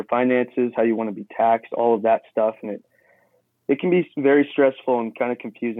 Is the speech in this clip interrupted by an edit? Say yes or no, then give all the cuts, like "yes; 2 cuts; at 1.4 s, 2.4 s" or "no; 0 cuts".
no; 0 cuts